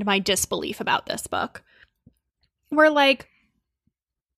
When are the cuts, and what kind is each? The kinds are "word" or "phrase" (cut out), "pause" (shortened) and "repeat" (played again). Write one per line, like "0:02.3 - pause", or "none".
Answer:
none